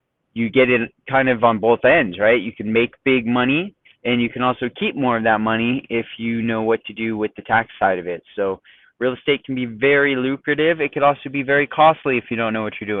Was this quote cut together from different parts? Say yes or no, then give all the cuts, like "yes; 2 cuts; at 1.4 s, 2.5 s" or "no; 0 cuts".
no; 0 cuts